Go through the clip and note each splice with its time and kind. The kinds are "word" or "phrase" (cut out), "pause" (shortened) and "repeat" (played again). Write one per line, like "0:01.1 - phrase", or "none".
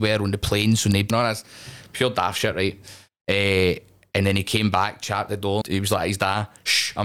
0:01.1 - phrase
0:05.6 - word